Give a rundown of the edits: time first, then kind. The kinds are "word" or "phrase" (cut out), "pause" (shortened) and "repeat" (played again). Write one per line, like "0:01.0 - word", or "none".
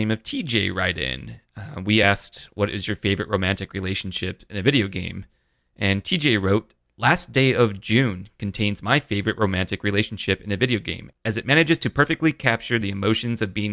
none